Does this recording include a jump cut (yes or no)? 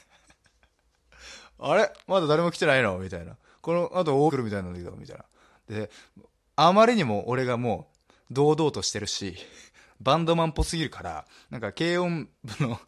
yes